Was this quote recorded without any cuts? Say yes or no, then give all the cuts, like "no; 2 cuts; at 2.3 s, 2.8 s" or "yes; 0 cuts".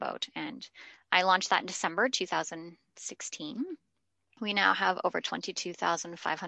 yes; 0 cuts